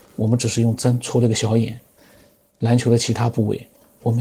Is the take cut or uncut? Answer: uncut